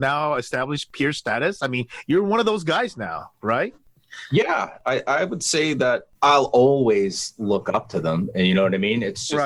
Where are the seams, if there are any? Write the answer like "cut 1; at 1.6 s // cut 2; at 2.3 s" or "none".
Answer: cut 1; at 6.1 s